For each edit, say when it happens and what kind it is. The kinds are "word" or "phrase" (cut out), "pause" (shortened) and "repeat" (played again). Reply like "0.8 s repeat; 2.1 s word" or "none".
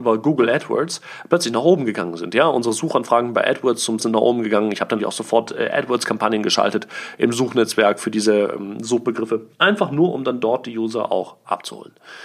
4.0 s word; 5.0 s word; 9.5 s pause